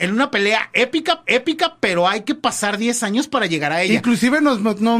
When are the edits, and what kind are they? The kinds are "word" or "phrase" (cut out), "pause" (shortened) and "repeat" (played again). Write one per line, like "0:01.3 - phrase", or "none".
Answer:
0:01.2 - repeat